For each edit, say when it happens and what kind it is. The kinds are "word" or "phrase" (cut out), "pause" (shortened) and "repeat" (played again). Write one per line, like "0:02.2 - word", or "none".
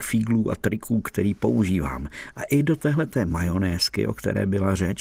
none